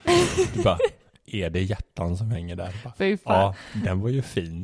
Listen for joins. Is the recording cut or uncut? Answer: uncut